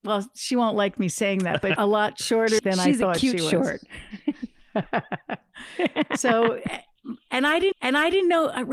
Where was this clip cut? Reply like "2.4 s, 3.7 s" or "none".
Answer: 1.8 s, 2.6 s, 7.7 s